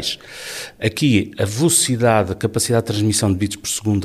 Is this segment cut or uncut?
uncut